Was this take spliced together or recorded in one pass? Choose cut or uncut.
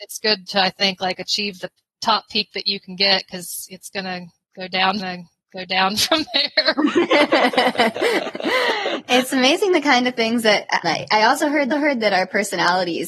cut